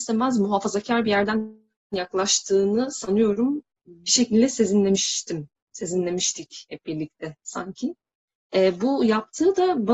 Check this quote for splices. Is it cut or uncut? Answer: uncut